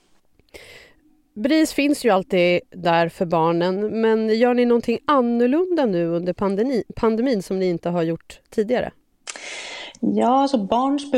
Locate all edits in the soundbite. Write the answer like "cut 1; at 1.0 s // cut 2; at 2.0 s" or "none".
none

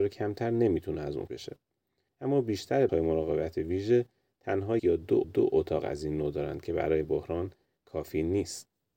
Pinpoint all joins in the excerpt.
cut 1; at 1.3 s // cut 2; at 2.9 s // cut 3; at 4.8 s // cut 4; at 5.2 s // cut 5; at 7.0 s

